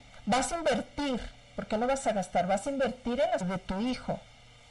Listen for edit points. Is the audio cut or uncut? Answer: cut